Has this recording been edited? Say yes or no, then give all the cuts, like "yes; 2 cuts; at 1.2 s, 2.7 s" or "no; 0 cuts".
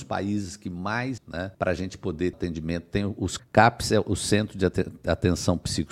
yes; 4 cuts; at 1.2 s, 1.5 s, 2.3 s, 3.4 s